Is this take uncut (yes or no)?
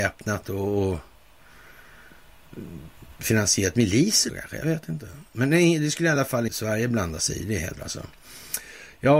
no